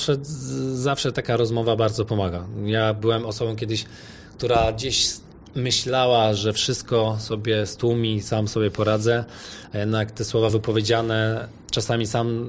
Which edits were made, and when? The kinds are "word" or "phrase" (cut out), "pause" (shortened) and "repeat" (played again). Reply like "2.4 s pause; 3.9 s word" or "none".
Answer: none